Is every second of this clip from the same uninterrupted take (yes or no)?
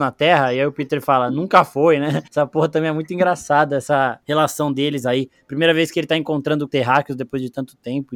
no